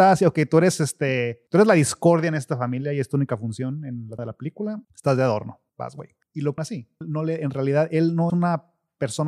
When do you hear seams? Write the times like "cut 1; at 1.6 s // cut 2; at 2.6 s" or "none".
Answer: cut 1; at 1.5 s // cut 2; at 4.2 s // cut 3; at 4.8 s // cut 4; at 5.7 s // cut 5; at 6.2 s // cut 6; at 6.6 s // cut 7; at 7.0 s // cut 8; at 8.3 s